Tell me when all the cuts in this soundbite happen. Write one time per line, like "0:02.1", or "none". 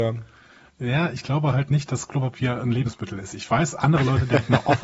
none